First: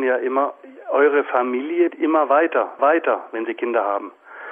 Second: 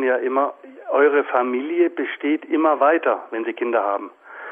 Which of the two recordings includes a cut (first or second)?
first